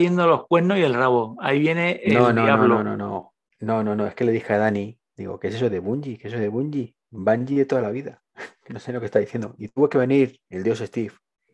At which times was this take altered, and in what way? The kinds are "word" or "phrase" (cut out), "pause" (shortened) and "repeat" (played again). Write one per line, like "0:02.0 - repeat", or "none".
none